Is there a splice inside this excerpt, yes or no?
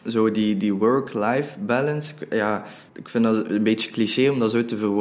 yes